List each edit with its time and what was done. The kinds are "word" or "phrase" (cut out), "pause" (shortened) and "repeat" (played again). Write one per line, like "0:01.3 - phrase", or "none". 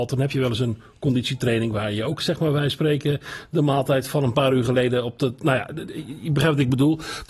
none